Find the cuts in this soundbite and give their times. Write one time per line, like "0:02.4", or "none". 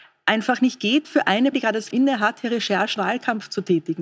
0:01.0
0:01.5
0:01.9
0:03.0